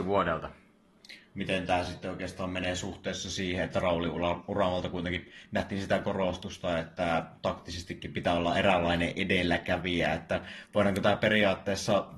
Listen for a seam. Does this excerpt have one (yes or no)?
no